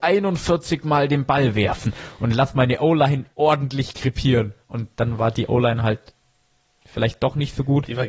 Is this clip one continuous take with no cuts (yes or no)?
no